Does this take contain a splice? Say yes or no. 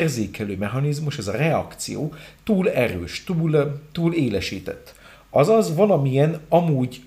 no